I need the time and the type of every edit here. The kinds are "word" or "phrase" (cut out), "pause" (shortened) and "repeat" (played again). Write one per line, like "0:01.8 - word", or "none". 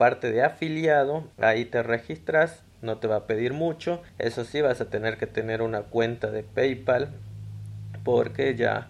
0:01.3 - pause
0:02.7 - pause
0:04.1 - pause